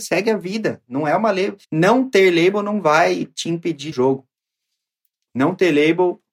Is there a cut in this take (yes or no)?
yes